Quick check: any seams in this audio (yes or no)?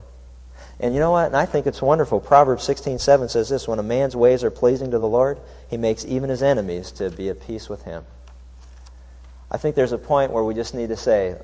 no